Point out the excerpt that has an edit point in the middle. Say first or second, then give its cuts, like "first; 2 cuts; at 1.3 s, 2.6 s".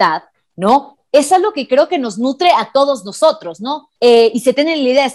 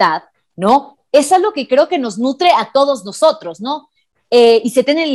first; 1 cut; at 4.0 s